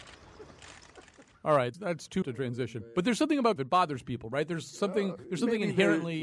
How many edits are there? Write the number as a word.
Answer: three